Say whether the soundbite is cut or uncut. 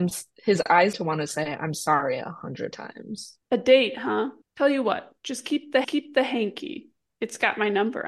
cut